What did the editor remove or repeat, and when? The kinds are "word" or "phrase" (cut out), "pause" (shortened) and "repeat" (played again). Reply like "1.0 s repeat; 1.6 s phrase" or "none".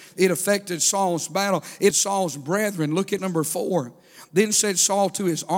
1.9 s word; 3.2 s word